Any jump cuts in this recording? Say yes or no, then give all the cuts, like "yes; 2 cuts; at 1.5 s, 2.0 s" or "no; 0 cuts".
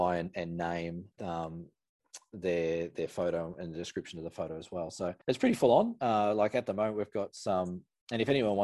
yes; 2 cuts; at 1.1 s, 5.2 s